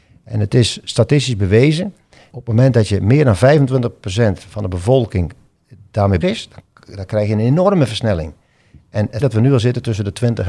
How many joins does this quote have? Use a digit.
3